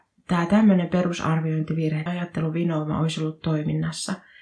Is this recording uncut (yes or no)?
no